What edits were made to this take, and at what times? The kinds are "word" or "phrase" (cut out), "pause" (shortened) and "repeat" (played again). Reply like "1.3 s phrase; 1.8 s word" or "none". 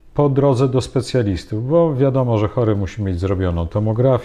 none